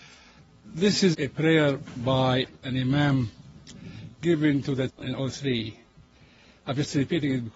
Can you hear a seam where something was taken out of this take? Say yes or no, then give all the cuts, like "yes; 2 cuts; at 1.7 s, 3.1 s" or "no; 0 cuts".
yes; 1 cut; at 4.9 s